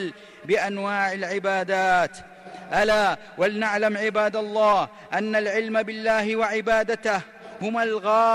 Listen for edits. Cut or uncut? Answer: uncut